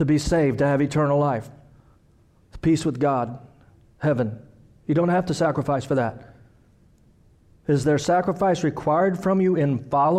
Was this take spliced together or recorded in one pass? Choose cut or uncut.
uncut